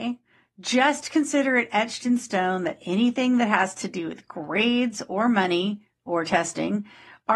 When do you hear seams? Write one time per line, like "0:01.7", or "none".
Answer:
none